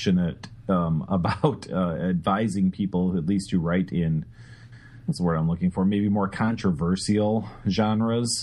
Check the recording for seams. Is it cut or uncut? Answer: uncut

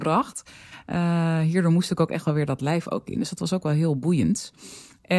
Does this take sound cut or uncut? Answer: uncut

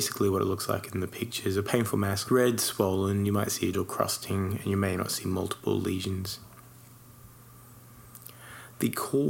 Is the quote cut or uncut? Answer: cut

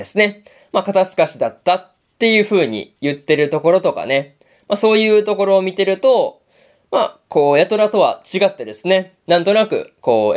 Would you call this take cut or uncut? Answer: uncut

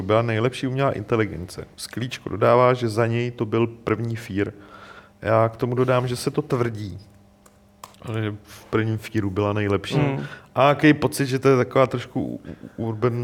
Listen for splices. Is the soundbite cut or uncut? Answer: cut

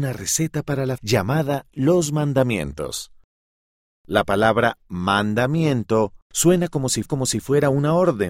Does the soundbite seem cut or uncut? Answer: cut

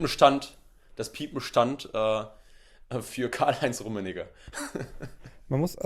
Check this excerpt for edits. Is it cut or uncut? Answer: uncut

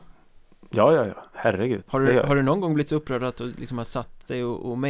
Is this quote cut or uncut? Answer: cut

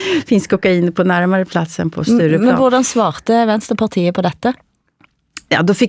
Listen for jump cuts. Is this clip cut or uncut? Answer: uncut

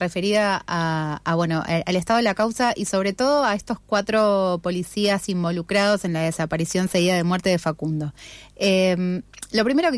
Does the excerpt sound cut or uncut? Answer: uncut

